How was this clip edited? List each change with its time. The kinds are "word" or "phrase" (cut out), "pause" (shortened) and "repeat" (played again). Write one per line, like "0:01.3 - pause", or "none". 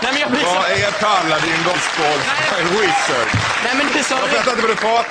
0:01.7 - word
0:03.9 - word

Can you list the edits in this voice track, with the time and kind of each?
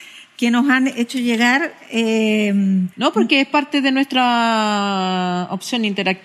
0:02.9 - pause

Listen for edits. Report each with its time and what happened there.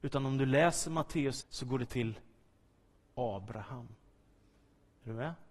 0:01.4 - word
0:01.9 - word

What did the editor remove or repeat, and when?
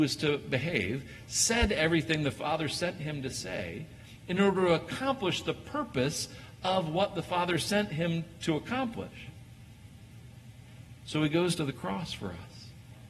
none

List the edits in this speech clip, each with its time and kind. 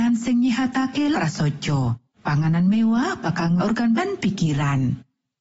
0:01.1 - word
0:02.1 - pause
0:03.6 - word
0:04.0 - word

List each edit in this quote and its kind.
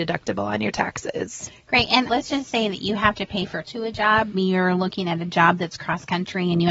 0:02.1 - word
0:03.6 - word
0:04.3 - word

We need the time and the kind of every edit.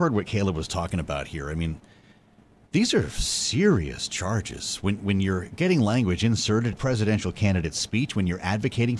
0:06.7 - word

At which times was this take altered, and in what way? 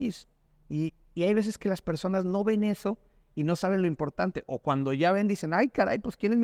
none

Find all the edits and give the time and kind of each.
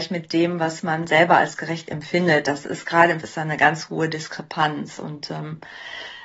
0:03.2 - word

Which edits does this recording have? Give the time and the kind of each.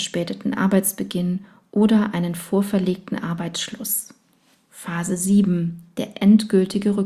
none

